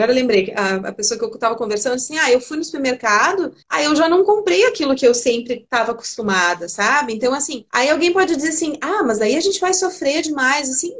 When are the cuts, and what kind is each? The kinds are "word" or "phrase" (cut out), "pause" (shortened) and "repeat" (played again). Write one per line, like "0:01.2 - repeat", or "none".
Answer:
0:03.6 - pause
0:07.7 - pause

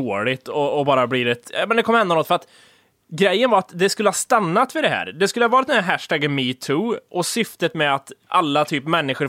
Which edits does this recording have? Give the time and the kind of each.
none

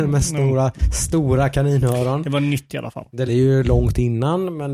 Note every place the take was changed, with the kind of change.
0:03.3 - word

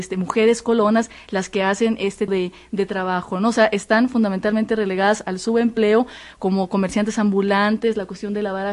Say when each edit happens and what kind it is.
0:02.3 - word

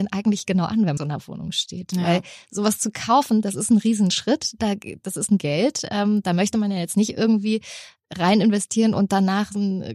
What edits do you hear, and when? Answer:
0:01.0 - phrase
0:05.4 - word

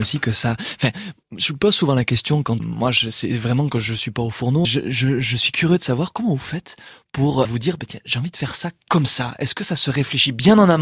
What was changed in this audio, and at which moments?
0:01.2 - pause
0:02.6 - word
0:04.6 - word
0:07.4 - word

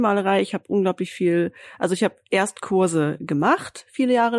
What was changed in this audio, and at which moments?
none

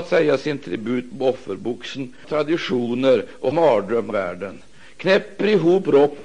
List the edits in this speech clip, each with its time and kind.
0:01.1 - word
0:02.2 - phrase
0:03.5 - word
0:04.1 - word

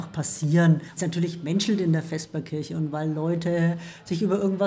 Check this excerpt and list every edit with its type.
0:01.0 - phrase

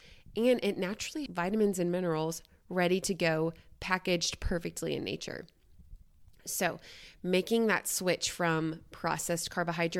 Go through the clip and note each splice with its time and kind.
0:01.3 - word

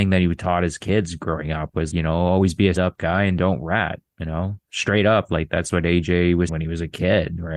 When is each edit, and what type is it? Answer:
0:01.9 - word
0:02.8 - word
0:04.1 - pause
0:06.5 - word

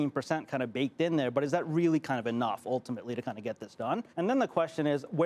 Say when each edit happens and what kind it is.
0:04.1 - pause

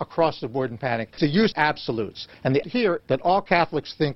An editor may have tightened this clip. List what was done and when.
0:01.2 - word
0:01.5 - word
0:02.6 - word
0:03.0 - word

